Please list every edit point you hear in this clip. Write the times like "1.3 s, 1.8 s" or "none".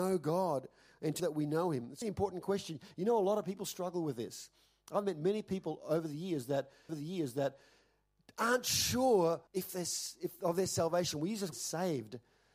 1.2 s, 2.0 s, 6.9 s, 9.5 s, 11.5 s